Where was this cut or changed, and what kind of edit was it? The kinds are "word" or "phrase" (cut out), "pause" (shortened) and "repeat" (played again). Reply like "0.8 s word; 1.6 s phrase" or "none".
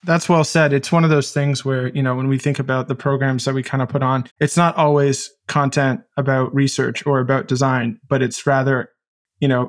4.3 s pause